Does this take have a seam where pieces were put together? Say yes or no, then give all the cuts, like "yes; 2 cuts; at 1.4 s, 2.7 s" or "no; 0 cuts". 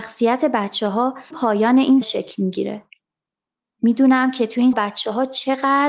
yes; 3 cuts; at 1.3 s, 2.0 s, 4.7 s